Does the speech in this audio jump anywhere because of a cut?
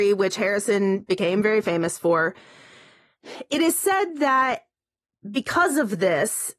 no; 0 cuts

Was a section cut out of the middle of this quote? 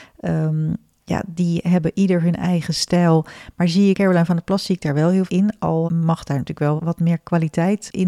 yes; 4 cuts; at 3.9 s, 5.3 s, 5.9 s, 6.8 s

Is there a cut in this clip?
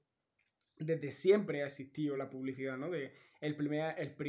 no; 0 cuts

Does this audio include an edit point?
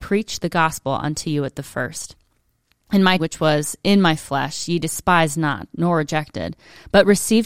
yes; 1 cut; at 3.2 s

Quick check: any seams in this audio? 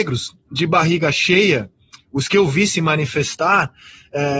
no; 0 cuts

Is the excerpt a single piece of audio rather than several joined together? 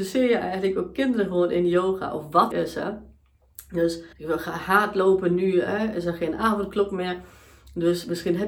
no; 2 cuts; at 2.5 s, 4.1 s

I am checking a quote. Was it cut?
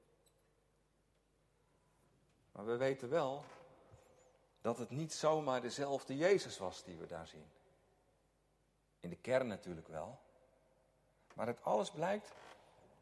no; 0 cuts

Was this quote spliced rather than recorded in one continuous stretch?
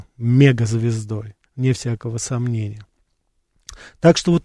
yes; 1 cut; at 1.4 s

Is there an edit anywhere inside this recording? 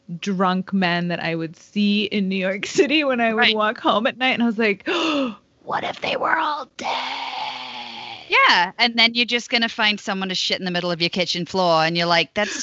no; 0 cuts

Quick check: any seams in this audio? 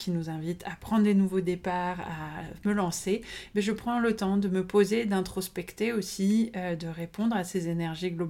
no; 0 cuts

